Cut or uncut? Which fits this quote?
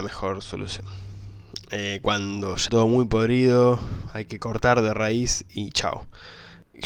cut